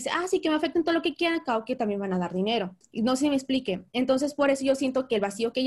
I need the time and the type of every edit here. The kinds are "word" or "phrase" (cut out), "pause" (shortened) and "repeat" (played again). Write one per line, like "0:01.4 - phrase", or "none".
0:02.8 - pause